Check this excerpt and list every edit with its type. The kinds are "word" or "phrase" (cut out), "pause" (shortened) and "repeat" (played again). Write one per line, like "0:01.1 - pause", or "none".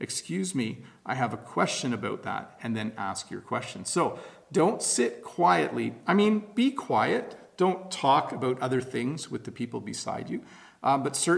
none